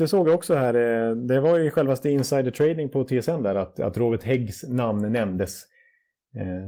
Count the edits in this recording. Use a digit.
0